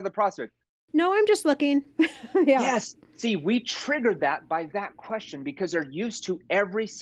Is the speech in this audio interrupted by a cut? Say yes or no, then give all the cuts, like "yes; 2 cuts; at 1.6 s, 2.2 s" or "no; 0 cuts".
no; 0 cuts